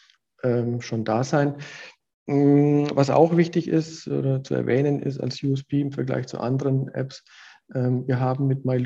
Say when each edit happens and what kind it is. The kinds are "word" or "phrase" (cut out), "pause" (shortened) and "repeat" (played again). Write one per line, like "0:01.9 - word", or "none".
none